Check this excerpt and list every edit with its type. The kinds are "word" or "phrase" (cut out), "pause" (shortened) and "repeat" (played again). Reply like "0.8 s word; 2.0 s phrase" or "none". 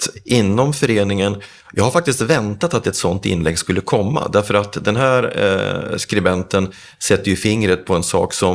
none